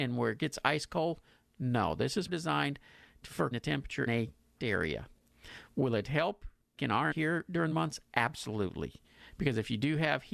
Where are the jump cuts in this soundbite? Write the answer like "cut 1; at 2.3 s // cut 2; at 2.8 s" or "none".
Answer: cut 1; at 2.3 s // cut 2; at 3.5 s // cut 3; at 4.1 s // cut 4; at 4.6 s // cut 5; at 6.8 s // cut 6; at 7.1 s // cut 7; at 7.7 s